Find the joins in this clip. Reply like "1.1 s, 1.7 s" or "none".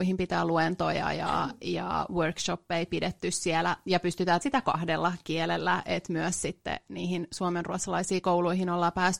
4.4 s